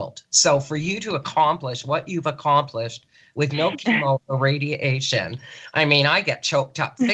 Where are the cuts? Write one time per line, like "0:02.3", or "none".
none